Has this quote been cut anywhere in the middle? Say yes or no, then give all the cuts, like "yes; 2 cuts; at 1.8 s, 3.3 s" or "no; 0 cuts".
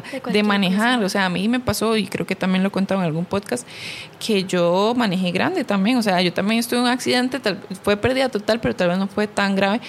no; 0 cuts